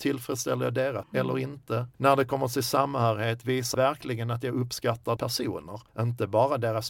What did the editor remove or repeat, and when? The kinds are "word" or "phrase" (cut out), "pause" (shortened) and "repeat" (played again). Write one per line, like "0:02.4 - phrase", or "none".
0:01.0 - phrase
0:01.9 - pause
0:03.7 - word
0:05.2 - phrase
0:05.9 - pause